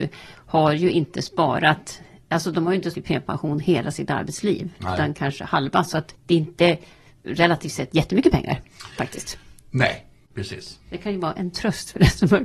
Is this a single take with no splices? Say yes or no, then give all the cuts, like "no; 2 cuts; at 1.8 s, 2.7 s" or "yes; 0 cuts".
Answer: no; 1 cut; at 2.9 s